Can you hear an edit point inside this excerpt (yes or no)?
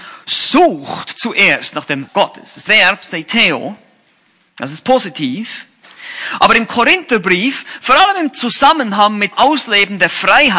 yes